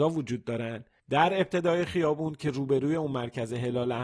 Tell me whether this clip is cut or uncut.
uncut